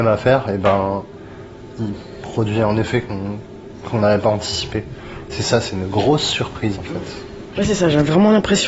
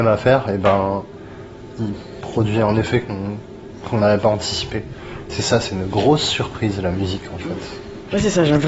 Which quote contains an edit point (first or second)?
first